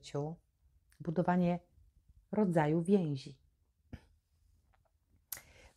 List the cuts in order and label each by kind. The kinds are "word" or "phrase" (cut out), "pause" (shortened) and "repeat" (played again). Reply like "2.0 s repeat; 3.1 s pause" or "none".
none